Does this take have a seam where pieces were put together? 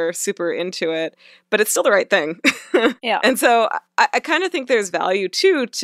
no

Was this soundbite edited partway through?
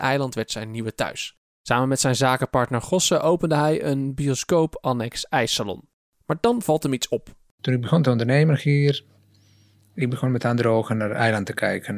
no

